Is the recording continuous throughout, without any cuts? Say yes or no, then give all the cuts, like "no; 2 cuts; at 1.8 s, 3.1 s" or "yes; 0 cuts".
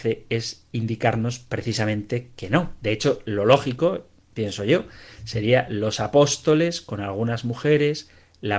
yes; 0 cuts